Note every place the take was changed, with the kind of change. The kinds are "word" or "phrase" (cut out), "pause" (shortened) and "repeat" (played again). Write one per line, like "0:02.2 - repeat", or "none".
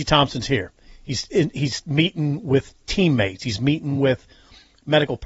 none